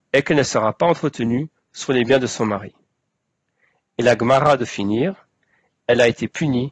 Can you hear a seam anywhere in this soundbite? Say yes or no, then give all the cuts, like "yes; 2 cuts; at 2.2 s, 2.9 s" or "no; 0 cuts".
no; 0 cuts